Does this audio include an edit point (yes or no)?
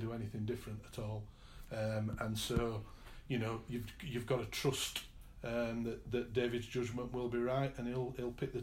no